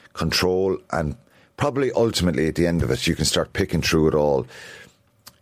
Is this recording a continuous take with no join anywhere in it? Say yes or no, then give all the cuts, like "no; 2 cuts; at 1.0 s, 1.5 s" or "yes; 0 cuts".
yes; 0 cuts